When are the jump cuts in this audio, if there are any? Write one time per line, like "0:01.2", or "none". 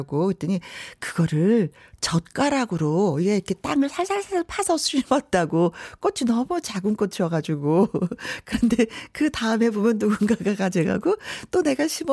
none